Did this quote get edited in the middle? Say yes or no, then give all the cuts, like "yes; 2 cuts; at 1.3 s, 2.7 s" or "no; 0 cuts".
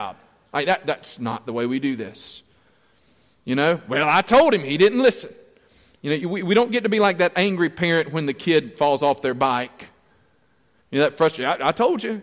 no; 0 cuts